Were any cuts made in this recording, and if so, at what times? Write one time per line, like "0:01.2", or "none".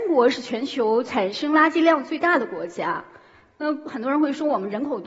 none